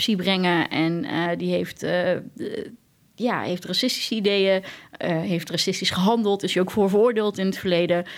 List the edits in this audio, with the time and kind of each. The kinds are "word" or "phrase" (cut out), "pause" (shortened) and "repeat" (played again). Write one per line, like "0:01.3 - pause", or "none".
none